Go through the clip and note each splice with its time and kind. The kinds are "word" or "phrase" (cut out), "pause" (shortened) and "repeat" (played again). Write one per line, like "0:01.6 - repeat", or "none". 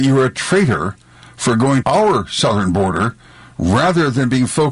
0:01.8 - word